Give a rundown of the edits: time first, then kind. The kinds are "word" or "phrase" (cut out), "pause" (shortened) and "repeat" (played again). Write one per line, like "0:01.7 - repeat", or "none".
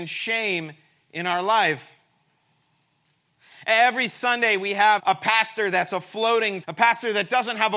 0:05.0 - word
0:06.6 - word